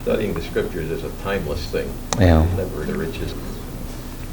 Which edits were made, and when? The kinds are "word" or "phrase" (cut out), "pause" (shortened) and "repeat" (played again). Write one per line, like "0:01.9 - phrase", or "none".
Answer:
0:02.9 - word
0:03.3 - word